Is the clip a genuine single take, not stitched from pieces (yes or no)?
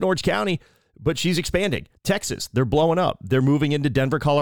no